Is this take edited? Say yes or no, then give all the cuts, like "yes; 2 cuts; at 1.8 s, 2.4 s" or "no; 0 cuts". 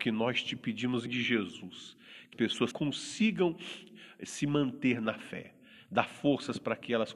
yes; 3 cuts; at 1.1 s, 2.3 s, 2.7 s